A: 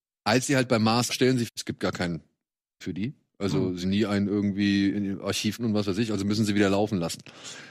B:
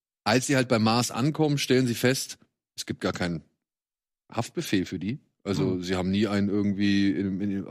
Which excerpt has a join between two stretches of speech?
A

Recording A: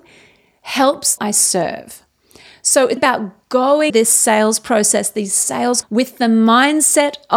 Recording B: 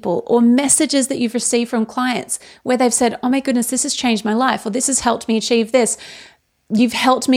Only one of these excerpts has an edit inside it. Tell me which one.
A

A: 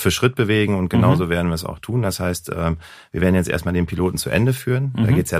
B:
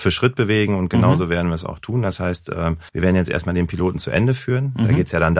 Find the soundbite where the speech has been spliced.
B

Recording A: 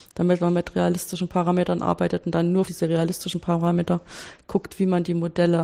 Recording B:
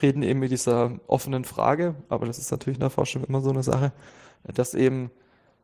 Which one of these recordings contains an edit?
A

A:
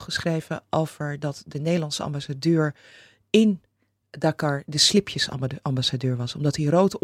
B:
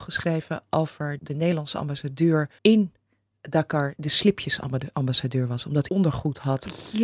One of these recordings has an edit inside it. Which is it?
B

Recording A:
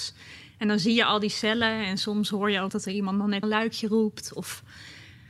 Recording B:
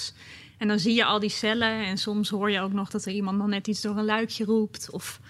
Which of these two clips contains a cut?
A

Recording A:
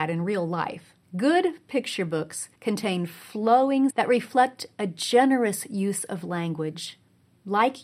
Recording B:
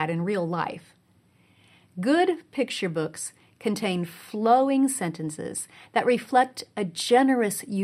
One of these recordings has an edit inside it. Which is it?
A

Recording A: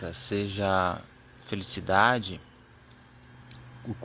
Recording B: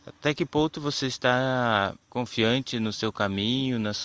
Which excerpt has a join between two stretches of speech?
B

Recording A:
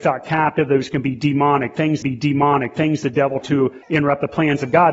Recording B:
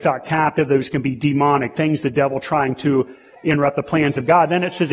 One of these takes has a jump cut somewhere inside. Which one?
A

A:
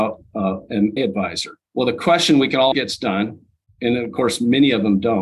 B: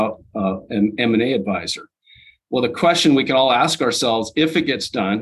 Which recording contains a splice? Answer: A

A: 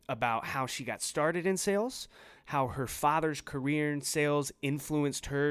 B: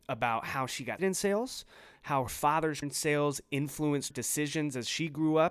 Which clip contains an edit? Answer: B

